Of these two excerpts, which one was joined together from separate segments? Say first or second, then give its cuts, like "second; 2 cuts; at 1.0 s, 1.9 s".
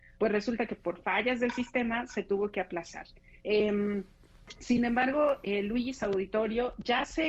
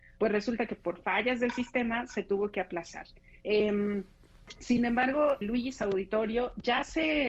second; 1 cut; at 5.4 s